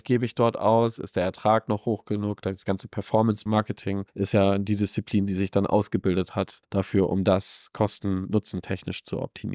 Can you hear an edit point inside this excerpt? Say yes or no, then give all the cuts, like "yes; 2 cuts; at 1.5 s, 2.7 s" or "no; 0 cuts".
no; 0 cuts